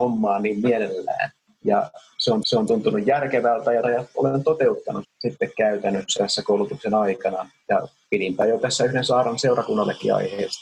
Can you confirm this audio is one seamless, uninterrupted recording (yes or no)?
no